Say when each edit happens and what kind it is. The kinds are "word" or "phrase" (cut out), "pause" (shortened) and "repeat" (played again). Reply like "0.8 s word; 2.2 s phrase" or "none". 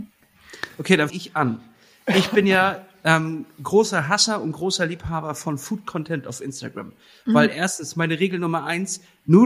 1.1 s word